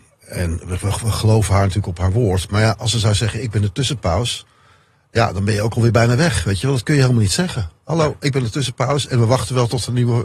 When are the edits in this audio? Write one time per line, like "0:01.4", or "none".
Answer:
none